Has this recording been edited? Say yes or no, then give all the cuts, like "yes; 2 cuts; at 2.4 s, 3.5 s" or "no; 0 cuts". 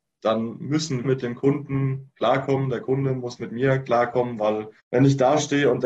yes; 2 cuts; at 1.0 s, 4.8 s